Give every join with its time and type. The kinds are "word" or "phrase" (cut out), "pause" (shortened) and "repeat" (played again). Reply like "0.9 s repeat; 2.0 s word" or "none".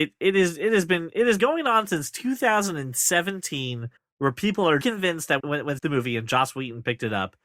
1.4 s word; 4.0 s pause; 4.8 s phrase; 5.4 s phrase; 5.8 s phrase